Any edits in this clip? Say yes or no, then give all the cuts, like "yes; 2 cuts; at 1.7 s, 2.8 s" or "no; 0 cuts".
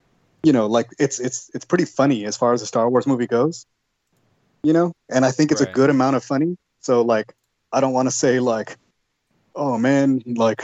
no; 0 cuts